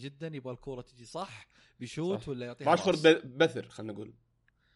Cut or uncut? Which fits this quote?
uncut